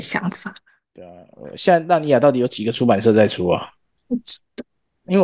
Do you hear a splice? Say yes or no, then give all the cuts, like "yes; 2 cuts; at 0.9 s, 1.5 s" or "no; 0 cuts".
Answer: no; 0 cuts